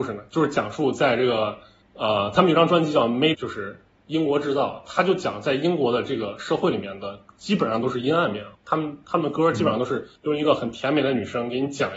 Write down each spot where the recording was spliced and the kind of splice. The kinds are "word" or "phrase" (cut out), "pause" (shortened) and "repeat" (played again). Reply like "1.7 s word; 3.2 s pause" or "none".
1.8 s pause; 3.3 s phrase; 8.5 s pause; 10.2 s pause